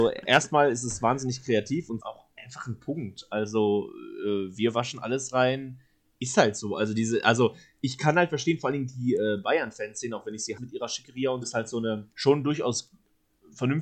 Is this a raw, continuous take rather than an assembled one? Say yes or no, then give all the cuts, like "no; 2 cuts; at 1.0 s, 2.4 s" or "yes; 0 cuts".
no; 4 cuts; at 2.0 s, 10.6 s, 11.4 s, 12.1 s